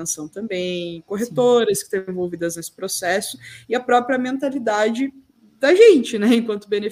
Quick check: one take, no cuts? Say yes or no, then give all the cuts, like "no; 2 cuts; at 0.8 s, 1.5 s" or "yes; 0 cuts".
yes; 0 cuts